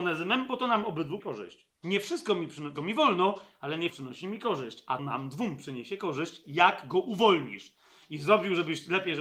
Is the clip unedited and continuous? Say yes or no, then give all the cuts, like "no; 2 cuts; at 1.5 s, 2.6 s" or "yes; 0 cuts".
no; 5 cuts; at 1.2 s, 1.7 s, 2.8 s, 3.9 s, 5.0 s